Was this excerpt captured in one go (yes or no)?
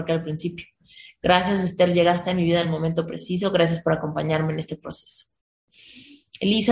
yes